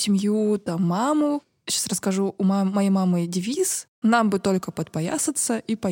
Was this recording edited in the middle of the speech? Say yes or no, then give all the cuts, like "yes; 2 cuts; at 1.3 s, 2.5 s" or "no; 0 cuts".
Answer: no; 0 cuts